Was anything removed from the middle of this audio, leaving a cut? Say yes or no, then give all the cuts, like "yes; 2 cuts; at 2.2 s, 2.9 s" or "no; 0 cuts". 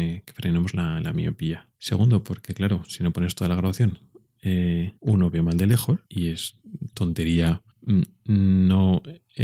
yes; 4 cuts; at 1.7 s, 5.0 s, 6.0 s, 7.7 s